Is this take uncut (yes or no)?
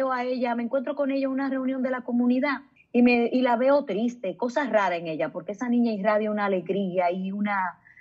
no